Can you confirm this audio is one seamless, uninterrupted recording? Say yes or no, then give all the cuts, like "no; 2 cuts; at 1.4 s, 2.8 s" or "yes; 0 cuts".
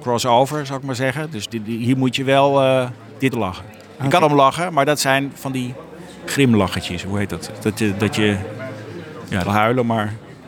no; 5 cuts; at 1.5 s, 3.3 s, 4.2 s, 7.5 s, 9.5 s